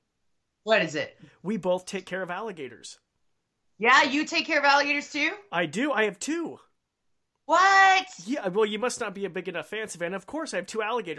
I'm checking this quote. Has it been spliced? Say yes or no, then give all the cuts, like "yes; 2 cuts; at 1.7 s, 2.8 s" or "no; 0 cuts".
no; 0 cuts